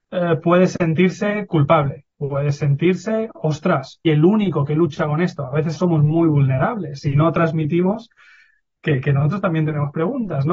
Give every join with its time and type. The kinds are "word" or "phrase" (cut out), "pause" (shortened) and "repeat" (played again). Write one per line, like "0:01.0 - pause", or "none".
0:02.1 - pause
0:04.0 - word
0:05.7 - phrase